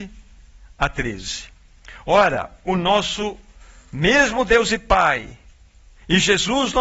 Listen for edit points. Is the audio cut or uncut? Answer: uncut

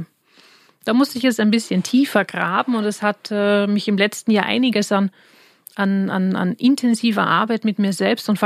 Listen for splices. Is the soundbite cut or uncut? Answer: uncut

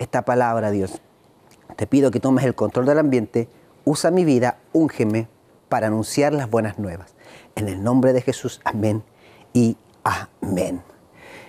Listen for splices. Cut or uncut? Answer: uncut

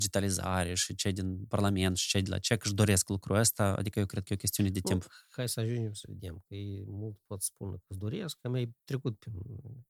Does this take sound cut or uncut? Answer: uncut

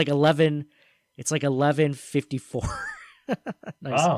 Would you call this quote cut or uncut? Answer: uncut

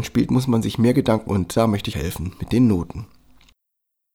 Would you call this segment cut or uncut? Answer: cut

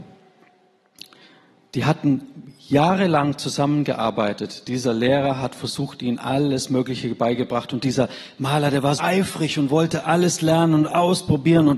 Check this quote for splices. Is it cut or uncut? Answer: cut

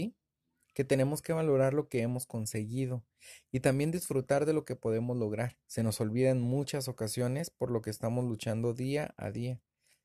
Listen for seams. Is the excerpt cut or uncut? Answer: cut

